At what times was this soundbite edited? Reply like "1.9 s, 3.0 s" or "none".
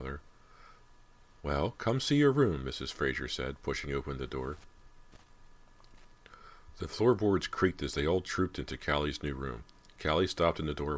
none